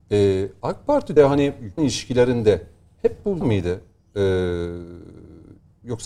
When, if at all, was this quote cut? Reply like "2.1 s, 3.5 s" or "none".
1.2 s, 1.8 s, 3.4 s